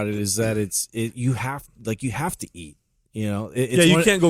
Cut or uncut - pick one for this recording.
uncut